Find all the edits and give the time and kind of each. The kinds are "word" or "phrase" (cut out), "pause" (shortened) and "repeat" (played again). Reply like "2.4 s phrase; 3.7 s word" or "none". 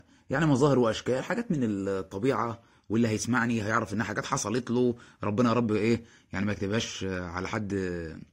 none